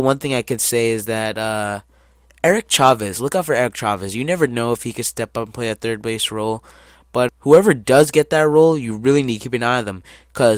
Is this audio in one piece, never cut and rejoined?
no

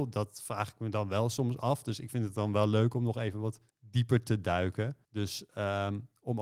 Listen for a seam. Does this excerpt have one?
yes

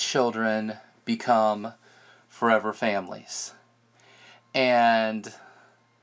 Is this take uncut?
yes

